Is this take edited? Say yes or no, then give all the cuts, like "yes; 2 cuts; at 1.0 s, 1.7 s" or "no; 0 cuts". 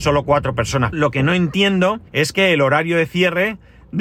yes; 2 cuts; at 0.9 s, 2.1 s